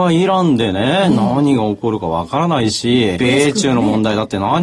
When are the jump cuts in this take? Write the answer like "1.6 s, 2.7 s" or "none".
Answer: 3.2 s